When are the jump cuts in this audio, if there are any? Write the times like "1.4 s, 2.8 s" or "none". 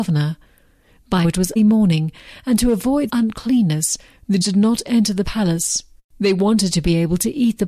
1.2 s, 1.6 s, 3.1 s, 4.4 s